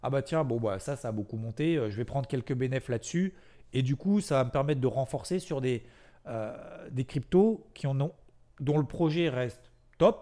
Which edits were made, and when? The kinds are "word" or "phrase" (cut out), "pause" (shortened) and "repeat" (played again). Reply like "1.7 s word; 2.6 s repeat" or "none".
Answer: none